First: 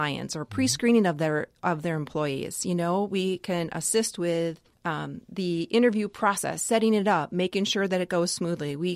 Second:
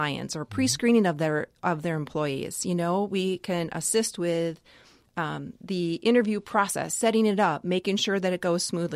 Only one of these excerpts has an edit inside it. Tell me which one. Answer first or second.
first